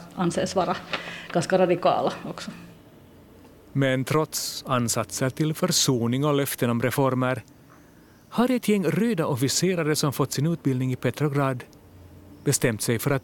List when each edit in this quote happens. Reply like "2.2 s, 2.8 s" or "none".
none